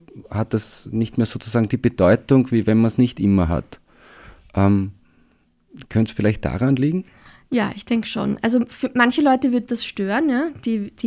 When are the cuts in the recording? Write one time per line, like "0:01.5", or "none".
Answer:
none